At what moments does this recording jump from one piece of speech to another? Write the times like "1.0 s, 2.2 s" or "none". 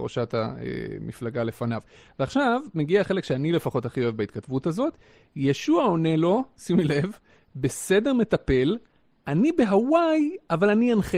none

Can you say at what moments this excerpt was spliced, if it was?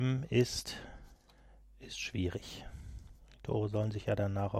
none

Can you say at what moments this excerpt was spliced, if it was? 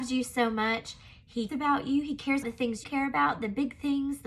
1.5 s, 2.4 s, 2.8 s

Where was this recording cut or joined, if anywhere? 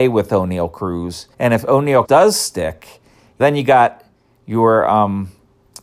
1.3 s, 2.0 s, 3.4 s

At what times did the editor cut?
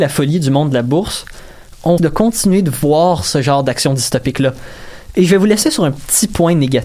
2.0 s

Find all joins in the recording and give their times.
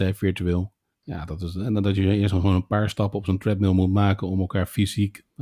0.9 s

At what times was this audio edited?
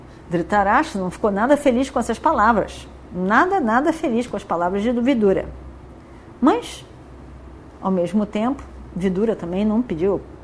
none

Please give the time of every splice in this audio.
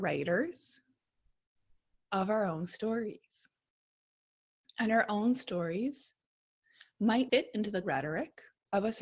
7.3 s, 7.8 s

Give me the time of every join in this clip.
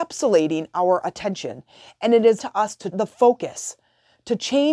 2.4 s, 2.9 s

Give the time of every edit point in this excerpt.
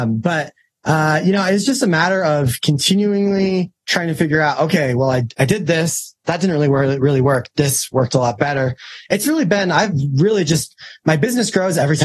none

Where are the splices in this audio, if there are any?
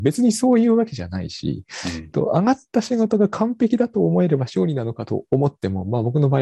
2.1 s

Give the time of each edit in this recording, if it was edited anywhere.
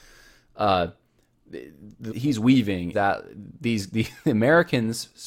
2.1 s, 2.9 s

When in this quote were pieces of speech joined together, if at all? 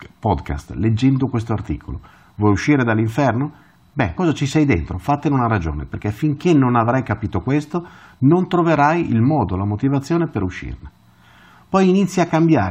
4.2 s

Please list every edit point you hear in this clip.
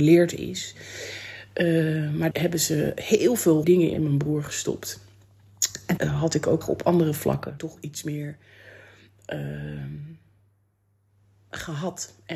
2.3 s, 3.6 s, 3.9 s, 6.0 s, 6.6 s, 7.6 s

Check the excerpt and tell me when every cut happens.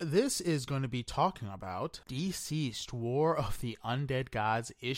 2.0 s

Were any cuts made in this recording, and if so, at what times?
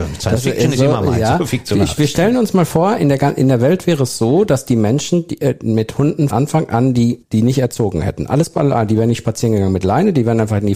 6.3 s, 7.2 s

